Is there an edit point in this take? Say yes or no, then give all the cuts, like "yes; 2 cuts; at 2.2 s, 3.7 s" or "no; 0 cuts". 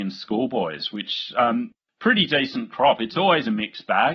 no; 0 cuts